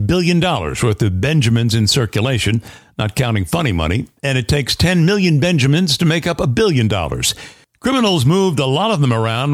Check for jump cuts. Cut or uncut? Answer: uncut